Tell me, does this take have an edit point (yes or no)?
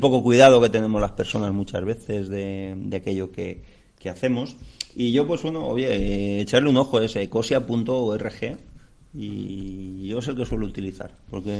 no